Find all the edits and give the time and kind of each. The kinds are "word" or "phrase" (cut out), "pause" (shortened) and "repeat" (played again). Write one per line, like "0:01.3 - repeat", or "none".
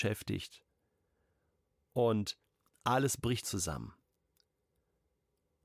0:03.4 - phrase